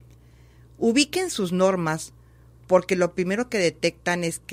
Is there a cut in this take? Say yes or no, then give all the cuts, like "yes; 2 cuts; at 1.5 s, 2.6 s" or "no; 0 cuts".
no; 0 cuts